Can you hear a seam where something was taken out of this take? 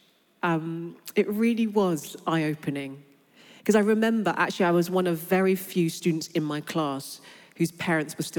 no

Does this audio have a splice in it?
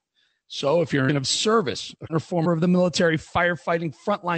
yes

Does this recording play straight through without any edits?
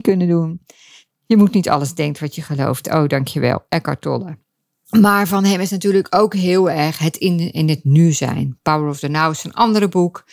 yes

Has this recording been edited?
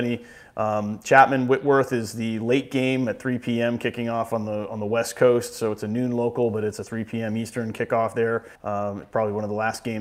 yes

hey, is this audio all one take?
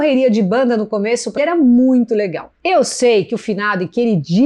no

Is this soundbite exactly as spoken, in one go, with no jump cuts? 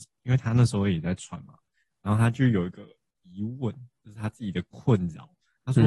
yes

